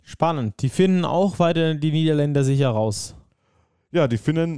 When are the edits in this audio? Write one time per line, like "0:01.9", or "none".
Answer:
none

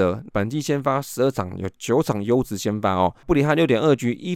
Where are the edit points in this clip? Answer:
0:03.2

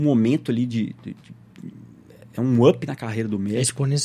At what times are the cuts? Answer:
none

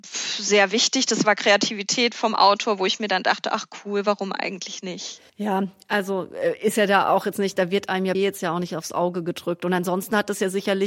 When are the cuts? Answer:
0:05.3
0:08.1

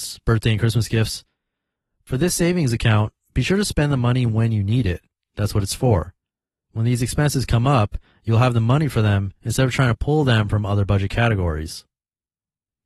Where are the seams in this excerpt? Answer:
none

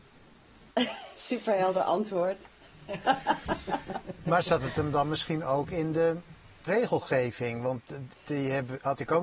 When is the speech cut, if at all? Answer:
0:06.7
0:08.1

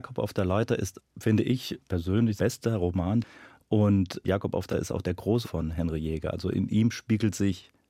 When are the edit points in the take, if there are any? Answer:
0:02.4
0:04.7
0:05.4

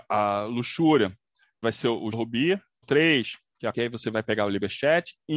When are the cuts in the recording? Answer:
0:01.6
0:02.1
0:02.8
0:03.7

